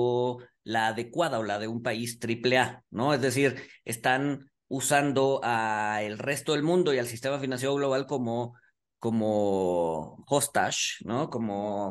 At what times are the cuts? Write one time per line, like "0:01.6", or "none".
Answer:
none